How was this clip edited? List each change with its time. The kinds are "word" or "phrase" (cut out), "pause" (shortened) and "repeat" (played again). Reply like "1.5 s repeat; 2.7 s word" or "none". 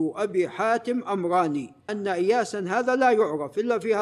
1.9 s word